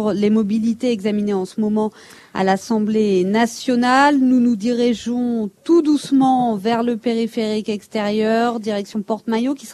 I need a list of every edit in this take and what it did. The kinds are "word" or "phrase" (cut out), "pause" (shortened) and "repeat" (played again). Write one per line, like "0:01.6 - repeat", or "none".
none